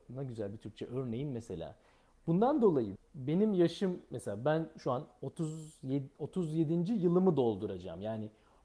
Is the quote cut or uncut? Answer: cut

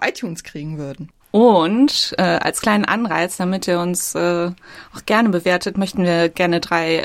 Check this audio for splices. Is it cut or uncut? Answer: cut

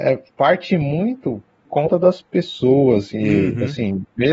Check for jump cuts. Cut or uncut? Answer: cut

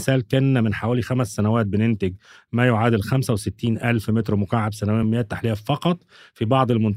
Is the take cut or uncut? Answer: uncut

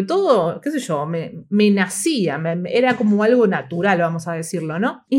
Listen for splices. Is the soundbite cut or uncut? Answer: uncut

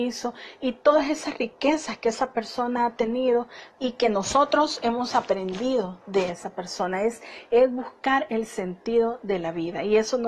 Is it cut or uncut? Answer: cut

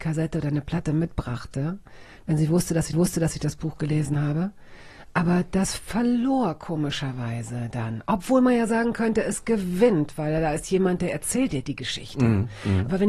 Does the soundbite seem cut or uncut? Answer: cut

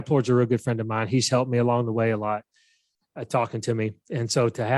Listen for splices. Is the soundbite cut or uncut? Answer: uncut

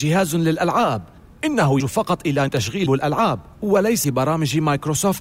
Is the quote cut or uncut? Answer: cut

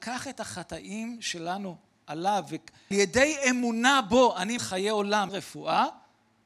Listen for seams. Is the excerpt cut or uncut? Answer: cut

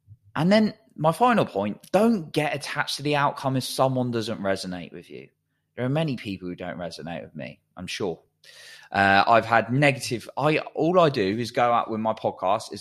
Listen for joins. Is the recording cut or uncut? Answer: uncut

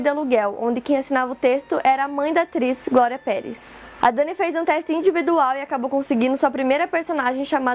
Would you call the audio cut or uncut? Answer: uncut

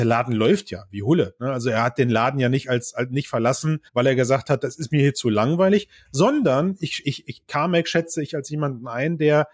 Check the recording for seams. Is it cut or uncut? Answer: cut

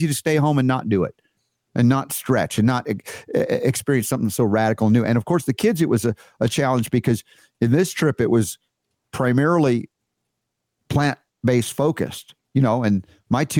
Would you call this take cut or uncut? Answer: uncut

